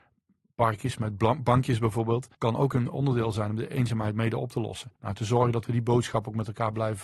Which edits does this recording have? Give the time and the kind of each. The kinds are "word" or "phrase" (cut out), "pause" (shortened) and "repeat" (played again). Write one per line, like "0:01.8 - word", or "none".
0:02.3 - pause
0:05.0 - pause